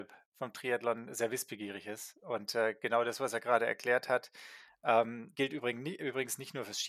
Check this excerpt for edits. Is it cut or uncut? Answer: cut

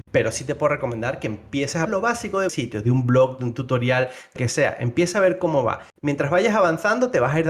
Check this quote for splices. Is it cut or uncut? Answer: cut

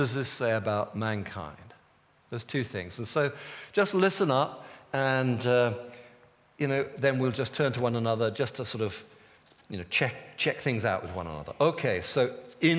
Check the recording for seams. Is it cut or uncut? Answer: uncut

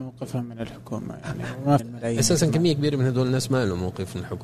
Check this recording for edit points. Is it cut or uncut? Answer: cut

